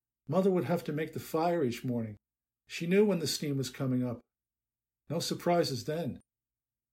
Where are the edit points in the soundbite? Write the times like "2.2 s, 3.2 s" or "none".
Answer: none